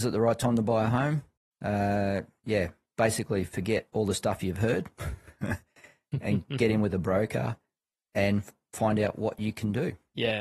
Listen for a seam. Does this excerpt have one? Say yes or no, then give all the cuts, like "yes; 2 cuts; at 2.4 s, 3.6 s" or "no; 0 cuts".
no; 0 cuts